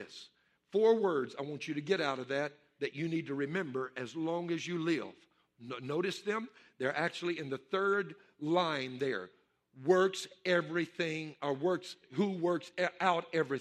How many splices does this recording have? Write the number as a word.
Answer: zero